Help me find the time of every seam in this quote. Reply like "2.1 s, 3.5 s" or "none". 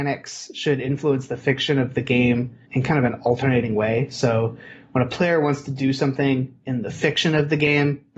2.6 s